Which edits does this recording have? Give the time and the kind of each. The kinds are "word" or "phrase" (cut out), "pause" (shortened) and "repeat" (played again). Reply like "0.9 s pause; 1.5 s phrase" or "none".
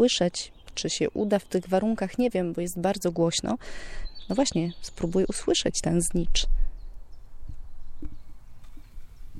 none